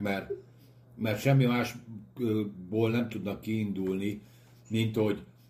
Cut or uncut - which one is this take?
uncut